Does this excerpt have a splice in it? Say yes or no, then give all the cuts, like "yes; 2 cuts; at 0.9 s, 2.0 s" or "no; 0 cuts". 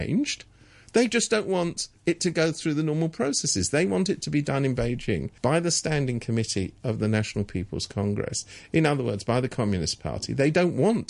yes; 1 cut; at 5.4 s